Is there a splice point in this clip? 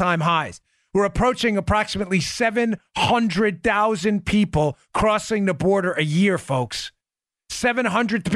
no; 0 cuts

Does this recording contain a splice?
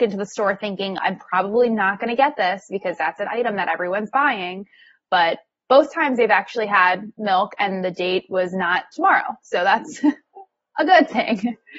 no; 0 cuts

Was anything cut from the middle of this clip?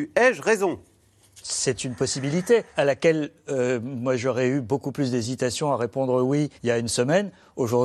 yes; 2 cuts; at 2.7 s, 6.6 s

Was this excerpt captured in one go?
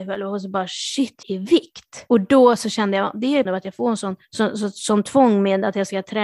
no; 3 cuts; at 1.2 s, 3.5 s, 4.2 s

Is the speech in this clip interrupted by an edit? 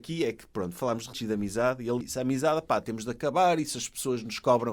yes; 2 cuts; at 1.1 s, 2.0 s

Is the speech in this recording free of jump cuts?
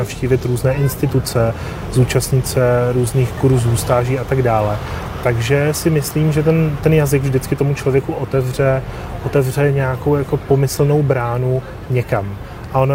yes; 0 cuts

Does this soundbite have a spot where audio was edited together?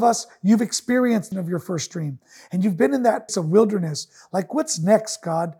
yes; 2 cuts; at 1.3 s, 3.3 s

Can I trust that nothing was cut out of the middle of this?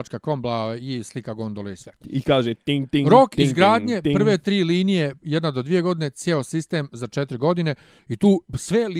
yes; 0 cuts

